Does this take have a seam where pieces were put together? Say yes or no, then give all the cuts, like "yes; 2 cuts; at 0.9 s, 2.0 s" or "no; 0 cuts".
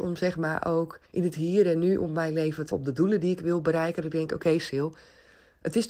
yes; 2 cuts; at 1.0 s, 2.7 s